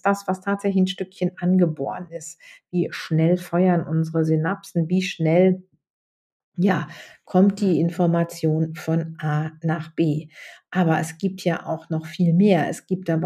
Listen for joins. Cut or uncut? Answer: uncut